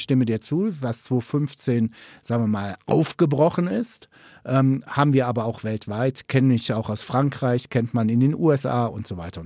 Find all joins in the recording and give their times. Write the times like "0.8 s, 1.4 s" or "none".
none